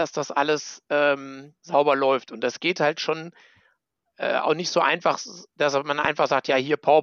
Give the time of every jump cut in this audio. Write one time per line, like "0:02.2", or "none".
0:01.6
0:05.5